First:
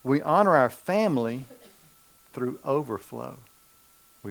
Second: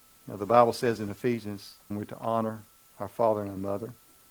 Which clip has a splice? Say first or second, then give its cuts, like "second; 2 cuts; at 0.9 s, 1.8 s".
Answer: second; 1 cut; at 1.9 s